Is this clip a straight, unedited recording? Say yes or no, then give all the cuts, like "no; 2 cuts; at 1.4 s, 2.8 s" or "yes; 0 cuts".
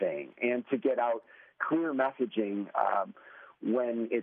yes; 0 cuts